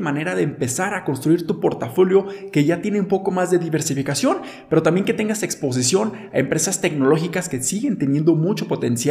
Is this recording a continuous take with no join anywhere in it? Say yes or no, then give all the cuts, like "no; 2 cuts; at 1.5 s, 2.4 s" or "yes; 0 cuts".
yes; 0 cuts